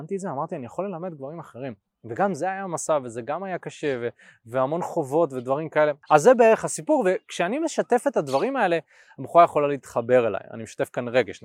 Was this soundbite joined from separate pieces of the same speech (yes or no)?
no